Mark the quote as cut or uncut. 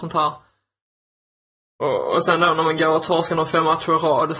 uncut